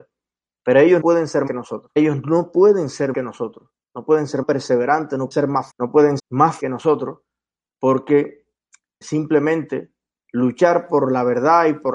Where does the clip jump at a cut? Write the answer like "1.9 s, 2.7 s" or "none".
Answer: 1.0 s, 1.5 s, 3.1 s, 4.4 s, 5.3 s, 5.7 s, 6.2 s, 6.6 s, 9.0 s